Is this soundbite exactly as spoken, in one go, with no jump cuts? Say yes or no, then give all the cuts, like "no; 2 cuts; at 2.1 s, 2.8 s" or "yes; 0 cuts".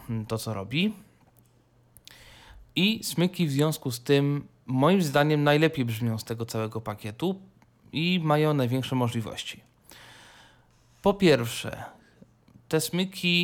yes; 0 cuts